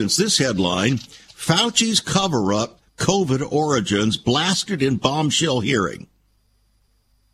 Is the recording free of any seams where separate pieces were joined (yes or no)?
yes